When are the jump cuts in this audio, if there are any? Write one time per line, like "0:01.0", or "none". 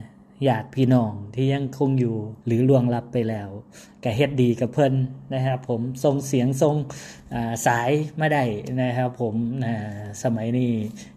0:02.4